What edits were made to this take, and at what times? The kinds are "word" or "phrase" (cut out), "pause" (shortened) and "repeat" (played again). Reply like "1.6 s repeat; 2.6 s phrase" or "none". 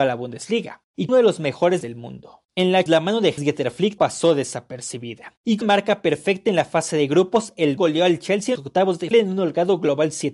1.1 s word; 1.8 s word; 2.9 s word; 3.4 s word; 4.0 s word; 5.6 s word; 7.8 s word; 8.6 s word; 9.1 s word